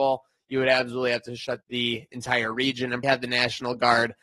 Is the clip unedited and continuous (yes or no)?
no